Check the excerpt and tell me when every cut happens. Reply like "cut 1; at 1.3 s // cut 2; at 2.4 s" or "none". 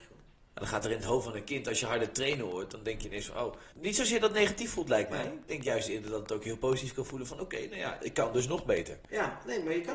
cut 1; at 3.7 s